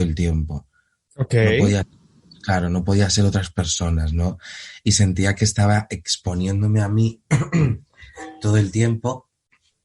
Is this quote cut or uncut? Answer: uncut